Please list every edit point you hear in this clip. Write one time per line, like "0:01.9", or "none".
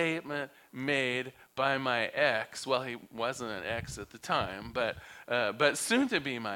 none